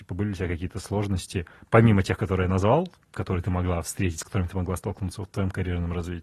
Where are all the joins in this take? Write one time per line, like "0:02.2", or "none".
none